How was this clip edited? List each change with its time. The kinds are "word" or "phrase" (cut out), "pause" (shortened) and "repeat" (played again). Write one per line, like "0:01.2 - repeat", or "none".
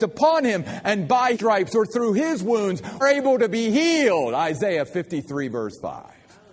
0:01.3 - word
0:03.0 - phrase